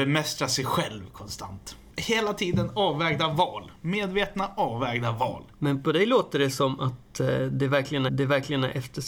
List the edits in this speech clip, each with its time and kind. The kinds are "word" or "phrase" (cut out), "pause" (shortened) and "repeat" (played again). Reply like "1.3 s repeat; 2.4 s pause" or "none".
8.1 s repeat